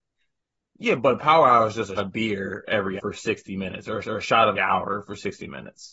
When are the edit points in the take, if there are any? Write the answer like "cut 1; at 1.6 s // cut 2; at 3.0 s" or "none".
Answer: cut 1; at 1.0 s // cut 2; at 2.0 s // cut 3; at 3.0 s // cut 4; at 4.0 s // cut 5; at 4.6 s